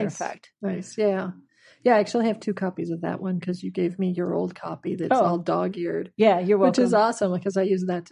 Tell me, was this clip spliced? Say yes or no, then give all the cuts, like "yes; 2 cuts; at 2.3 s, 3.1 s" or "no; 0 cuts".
no; 0 cuts